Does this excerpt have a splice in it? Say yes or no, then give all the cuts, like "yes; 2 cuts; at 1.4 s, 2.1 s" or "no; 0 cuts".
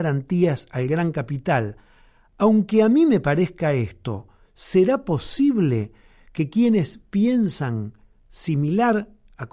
no; 0 cuts